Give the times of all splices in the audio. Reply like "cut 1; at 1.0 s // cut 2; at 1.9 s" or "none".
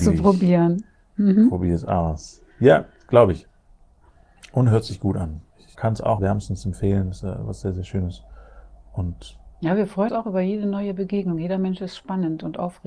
cut 1; at 2.5 s // cut 2; at 5.7 s // cut 3; at 6.2 s // cut 4; at 7.2 s // cut 5; at 10.1 s